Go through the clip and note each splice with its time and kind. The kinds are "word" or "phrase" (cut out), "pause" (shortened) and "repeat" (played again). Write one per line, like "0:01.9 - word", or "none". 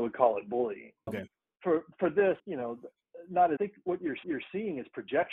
0:01.1 - word
0:02.4 - pause
0:03.6 - phrase
0:04.2 - repeat